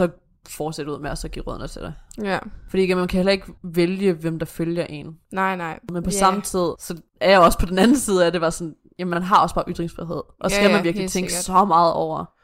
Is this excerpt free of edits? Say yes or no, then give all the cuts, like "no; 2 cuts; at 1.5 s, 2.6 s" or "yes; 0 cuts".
no; 3 cuts; at 3.6 s, 5.2 s, 7.1 s